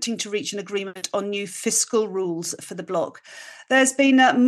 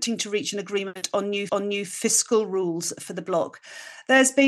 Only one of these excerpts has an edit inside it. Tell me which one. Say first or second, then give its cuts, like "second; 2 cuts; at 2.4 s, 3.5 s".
second; 1 cut; at 1.5 s